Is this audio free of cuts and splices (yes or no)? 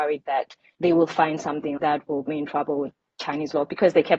no